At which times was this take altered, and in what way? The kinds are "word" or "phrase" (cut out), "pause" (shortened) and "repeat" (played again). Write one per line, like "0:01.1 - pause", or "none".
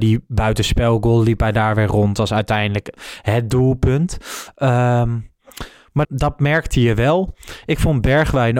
0:06.0 - word